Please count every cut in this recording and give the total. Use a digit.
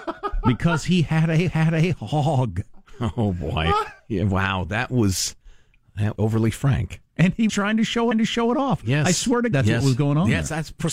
7